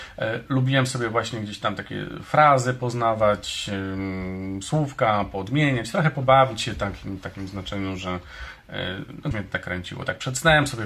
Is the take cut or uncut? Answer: cut